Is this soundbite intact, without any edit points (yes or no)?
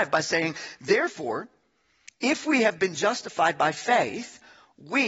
yes